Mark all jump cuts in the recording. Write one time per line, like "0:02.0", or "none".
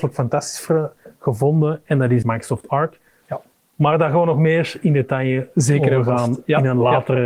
0:02.2